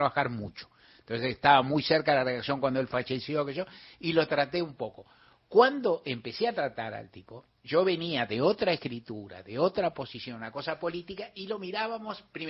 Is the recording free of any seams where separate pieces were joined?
yes; 0 cuts

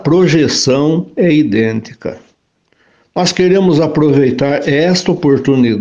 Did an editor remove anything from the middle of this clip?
no; 0 cuts

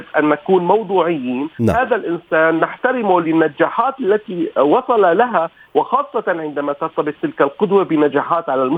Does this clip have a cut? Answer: no; 0 cuts

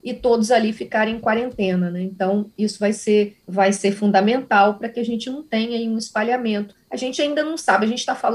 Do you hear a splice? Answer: yes; 2 cuts; at 3.4 s, 6.8 s

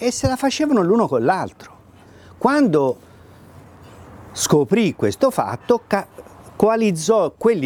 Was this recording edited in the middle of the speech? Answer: no; 0 cuts

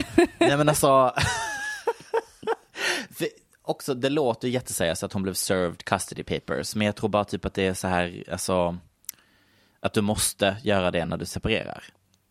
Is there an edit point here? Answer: no; 0 cuts

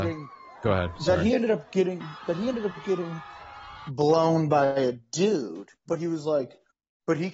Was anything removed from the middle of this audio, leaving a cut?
yes; 1 cut; at 5.8 s

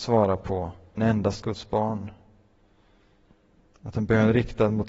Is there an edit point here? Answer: yes; 3 cuts; at 1.0 s, 1.4 s, 3.2 s

